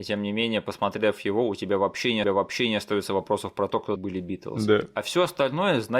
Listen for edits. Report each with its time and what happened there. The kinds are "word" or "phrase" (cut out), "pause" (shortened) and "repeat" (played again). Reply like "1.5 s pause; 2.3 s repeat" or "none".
2.2 s repeat; 4.0 s word